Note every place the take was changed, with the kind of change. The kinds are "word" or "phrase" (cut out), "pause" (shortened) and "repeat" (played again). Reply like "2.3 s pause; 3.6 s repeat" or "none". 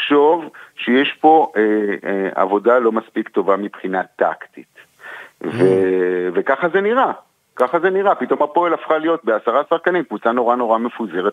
none